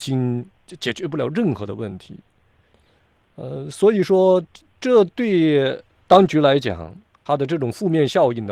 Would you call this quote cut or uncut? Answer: uncut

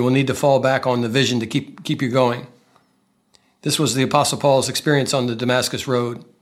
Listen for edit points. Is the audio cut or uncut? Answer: uncut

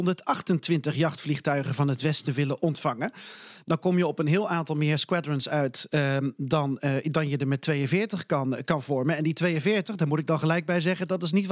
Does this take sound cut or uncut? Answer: uncut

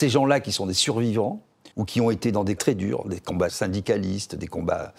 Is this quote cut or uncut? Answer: cut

